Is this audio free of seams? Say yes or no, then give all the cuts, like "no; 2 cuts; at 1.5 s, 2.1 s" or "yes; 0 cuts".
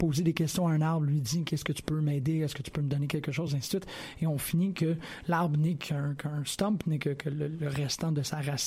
yes; 0 cuts